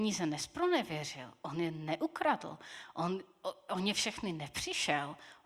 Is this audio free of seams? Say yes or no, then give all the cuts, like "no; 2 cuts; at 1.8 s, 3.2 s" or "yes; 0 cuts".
yes; 0 cuts